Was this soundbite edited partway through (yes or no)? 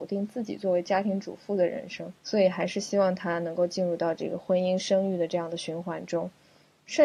yes